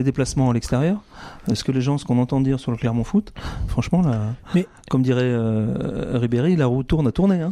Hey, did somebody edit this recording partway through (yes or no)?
yes